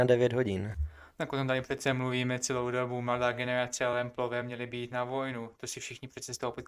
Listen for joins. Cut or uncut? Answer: uncut